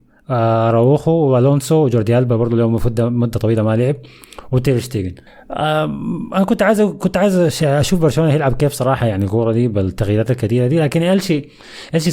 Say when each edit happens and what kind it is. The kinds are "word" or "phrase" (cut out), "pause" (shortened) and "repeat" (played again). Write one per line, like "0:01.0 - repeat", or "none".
0:05.3 - pause